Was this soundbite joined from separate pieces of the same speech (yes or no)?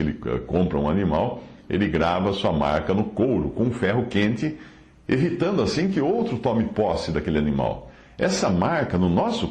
no